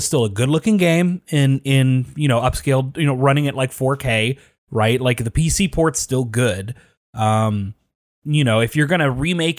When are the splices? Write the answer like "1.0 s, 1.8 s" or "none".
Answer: none